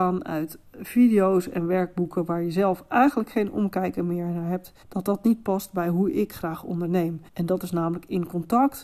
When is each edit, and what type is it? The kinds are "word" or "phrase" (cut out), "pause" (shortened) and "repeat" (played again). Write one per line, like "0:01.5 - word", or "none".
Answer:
0:04.8 - pause
0:07.3 - pause

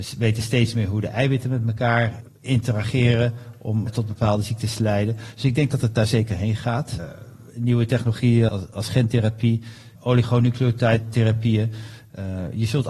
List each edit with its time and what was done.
0:08.5 - word
0:10.0 - word

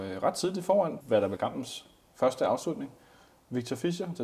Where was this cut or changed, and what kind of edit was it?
0:01.0 - word
0:01.4 - word

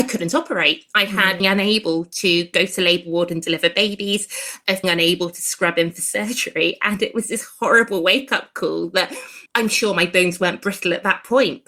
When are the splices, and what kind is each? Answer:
0:01.4 - phrase
0:04.8 - word
0:09.5 - pause

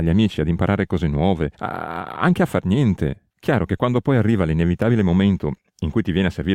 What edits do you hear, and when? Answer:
0:01.5 - pause
0:03.3 - pause

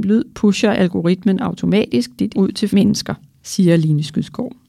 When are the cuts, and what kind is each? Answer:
0:02.3 - word
0:02.7 - word

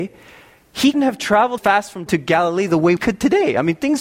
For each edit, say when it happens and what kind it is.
0:00.9 - word
0:01.6 - word
0:02.1 - word
0:03.0 - word

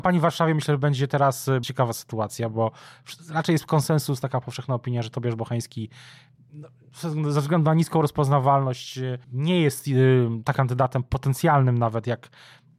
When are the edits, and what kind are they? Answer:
0:01.6 - word
0:09.2 - pause
0:10.5 - word

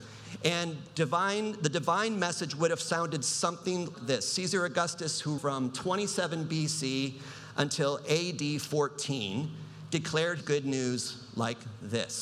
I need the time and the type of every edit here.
0:03.9 - word
0:05.4 - word
0:10.4 - word

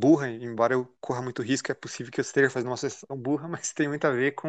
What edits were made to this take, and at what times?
0:03.1 - word

